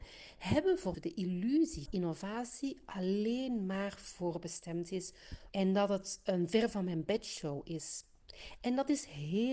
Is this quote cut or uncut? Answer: cut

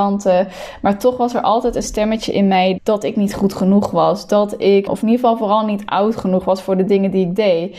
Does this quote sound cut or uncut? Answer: cut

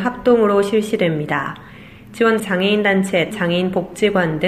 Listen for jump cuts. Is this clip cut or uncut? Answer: cut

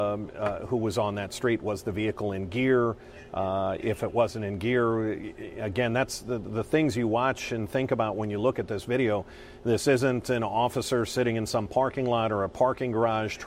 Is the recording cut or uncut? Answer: uncut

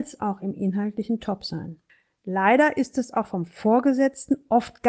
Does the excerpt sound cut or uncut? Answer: uncut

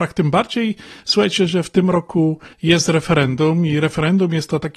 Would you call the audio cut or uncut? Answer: cut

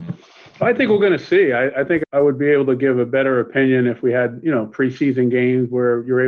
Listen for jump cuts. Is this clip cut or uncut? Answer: cut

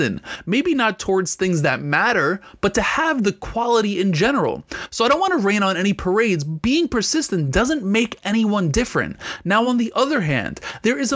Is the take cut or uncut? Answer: uncut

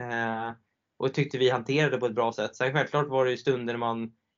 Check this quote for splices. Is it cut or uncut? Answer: uncut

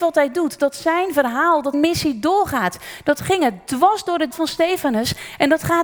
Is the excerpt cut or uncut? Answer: cut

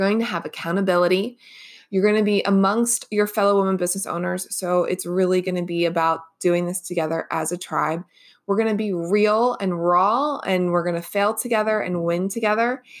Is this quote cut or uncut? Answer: uncut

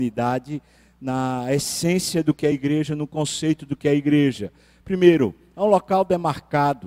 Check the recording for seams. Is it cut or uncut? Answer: uncut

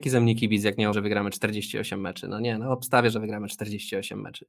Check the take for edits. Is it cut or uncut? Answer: cut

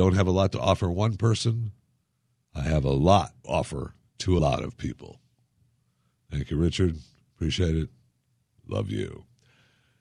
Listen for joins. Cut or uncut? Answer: cut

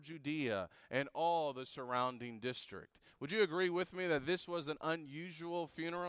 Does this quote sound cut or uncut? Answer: uncut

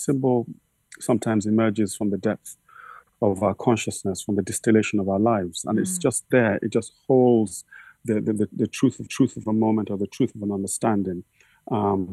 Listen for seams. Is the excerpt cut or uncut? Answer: cut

